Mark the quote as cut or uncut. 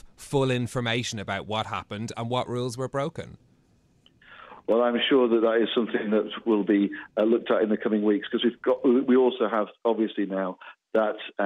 uncut